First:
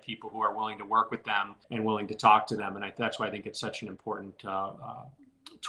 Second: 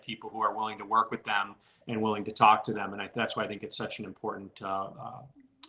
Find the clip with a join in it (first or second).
first